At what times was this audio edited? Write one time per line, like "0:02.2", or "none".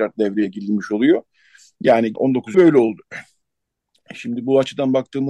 0:02.1
0:02.5